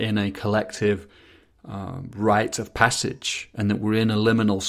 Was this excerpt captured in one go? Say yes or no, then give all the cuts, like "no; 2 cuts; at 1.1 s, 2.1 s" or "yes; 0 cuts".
yes; 0 cuts